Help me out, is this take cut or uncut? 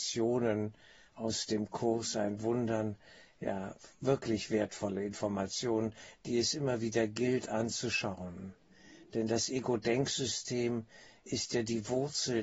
uncut